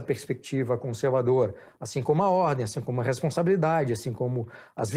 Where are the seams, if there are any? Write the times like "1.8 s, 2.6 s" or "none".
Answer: none